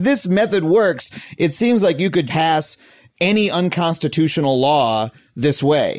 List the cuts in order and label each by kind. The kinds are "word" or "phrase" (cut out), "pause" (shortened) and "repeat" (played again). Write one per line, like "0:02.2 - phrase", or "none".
0:02.3 - word